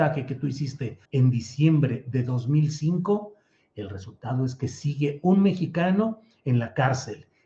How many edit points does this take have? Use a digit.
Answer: 1